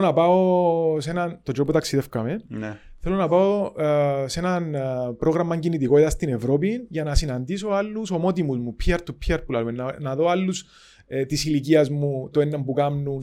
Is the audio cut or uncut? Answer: uncut